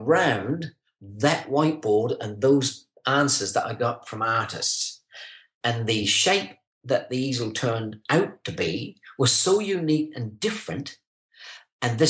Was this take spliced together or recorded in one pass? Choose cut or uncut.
uncut